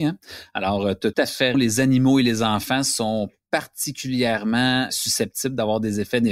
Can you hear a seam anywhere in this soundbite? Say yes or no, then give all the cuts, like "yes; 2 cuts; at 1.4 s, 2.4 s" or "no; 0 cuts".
yes; 2 cuts; at 1.1 s, 1.5 s